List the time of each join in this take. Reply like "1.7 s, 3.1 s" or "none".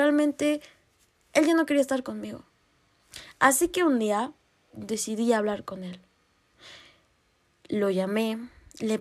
none